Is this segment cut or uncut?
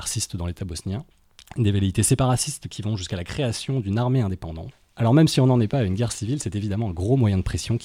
uncut